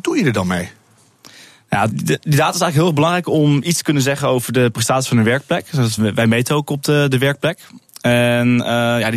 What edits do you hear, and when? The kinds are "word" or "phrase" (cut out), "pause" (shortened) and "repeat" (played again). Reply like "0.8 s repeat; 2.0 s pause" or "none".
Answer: 1.9 s word; 6.0 s word

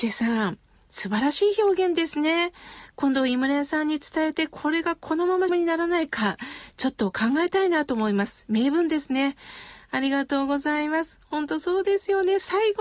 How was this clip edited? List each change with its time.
5.5 s word

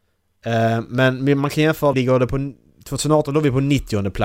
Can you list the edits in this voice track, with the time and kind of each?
1.9 s phrase

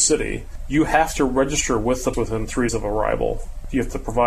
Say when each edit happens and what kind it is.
2.1 s word; 2.7 s word

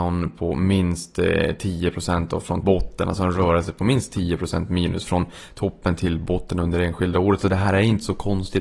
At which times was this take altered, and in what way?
2.6 s phrase

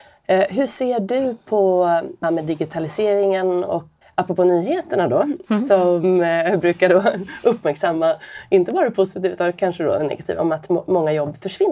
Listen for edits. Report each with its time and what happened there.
2.2 s word; 4.0 s word

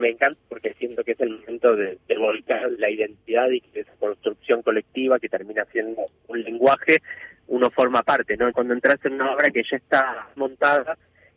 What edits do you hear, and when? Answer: 2.0 s word; 2.7 s word; 6.1 s word; 8.5 s word; 10.4 s phrase

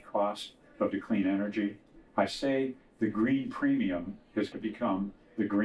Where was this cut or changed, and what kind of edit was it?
0.9 s word; 2.1 s pause; 4.5 s word

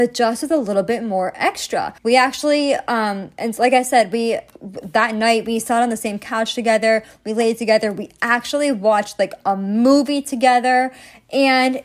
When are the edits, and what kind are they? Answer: 2.0 s pause

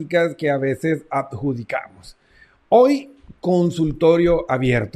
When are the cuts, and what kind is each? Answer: none

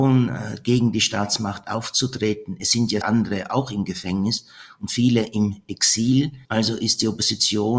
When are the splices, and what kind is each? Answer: 3.0 s word; 6.4 s pause

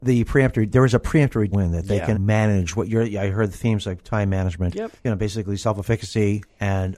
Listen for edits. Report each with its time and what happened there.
1.5 s phrase; 2.1 s word; 5.0 s pause

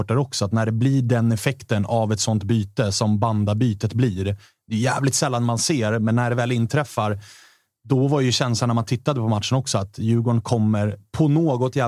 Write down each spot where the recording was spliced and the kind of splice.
none

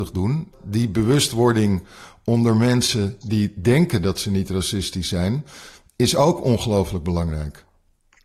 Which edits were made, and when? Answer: none

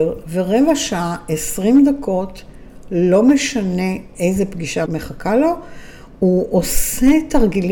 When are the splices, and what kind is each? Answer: 4.9 s word

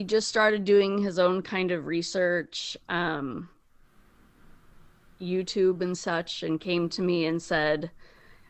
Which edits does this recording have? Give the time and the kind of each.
none

